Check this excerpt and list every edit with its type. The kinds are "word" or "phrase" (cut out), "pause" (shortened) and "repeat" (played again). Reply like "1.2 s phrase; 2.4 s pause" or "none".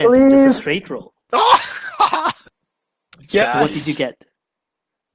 none